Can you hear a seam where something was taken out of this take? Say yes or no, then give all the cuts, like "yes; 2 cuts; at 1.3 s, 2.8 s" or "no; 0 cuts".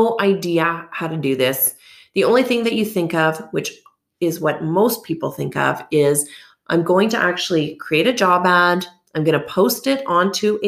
no; 0 cuts